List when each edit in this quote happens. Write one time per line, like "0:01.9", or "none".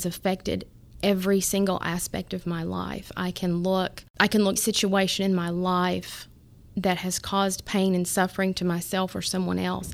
0:04.1
0:04.6